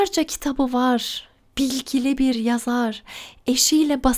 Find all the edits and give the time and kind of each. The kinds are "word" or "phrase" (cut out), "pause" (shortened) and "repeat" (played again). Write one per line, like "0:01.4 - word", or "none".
none